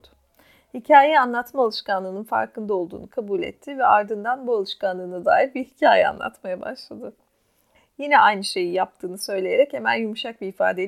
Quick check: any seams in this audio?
no; 0 cuts

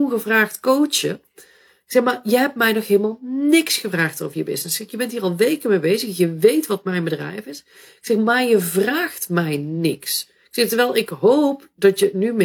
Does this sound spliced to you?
no; 0 cuts

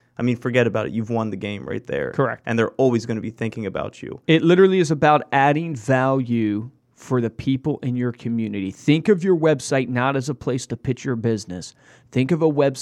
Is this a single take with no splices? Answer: yes; 0 cuts

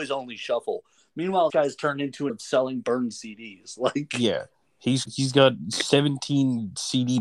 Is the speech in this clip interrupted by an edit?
yes; 3 cuts; at 1.5 s, 2.3 s, 5.0 s

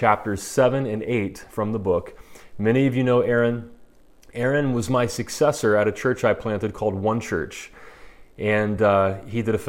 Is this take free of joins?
yes; 0 cuts

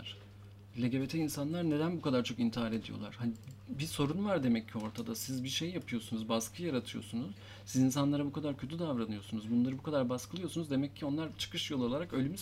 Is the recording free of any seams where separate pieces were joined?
yes; 0 cuts

